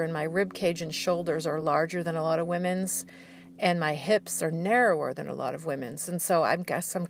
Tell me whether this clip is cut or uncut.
uncut